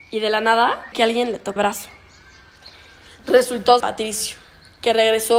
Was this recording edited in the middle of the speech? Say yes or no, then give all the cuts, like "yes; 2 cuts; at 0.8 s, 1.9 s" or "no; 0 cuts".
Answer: yes; 3 cuts; at 0.9 s, 1.6 s, 3.8 s